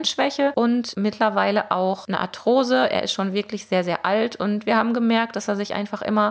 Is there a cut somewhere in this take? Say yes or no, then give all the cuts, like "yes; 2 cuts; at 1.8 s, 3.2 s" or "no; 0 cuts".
no; 0 cuts